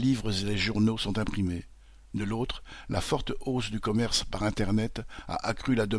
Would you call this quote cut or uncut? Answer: uncut